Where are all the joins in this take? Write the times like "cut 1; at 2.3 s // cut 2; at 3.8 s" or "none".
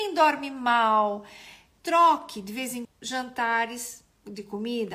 cut 1; at 2.8 s